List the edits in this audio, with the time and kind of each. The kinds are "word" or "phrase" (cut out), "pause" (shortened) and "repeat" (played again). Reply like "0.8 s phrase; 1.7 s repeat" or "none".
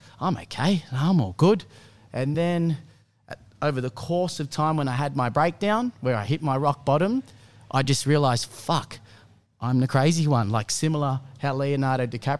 none